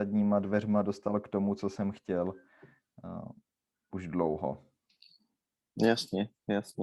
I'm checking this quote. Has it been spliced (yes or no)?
no